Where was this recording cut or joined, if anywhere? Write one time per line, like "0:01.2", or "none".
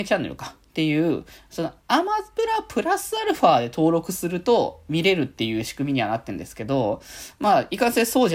0:01.8